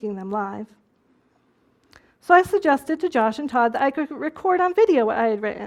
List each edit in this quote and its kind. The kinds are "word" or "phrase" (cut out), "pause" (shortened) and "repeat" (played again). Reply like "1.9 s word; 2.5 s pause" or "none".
none